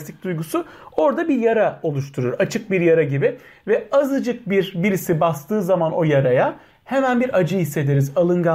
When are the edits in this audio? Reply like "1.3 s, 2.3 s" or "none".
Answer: none